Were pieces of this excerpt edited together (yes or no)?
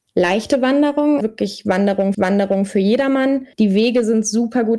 yes